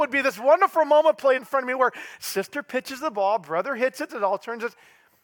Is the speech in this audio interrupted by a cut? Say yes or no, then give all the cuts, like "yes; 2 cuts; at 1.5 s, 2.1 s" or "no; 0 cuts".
yes; 2 cuts; at 1.4 s, 4.1 s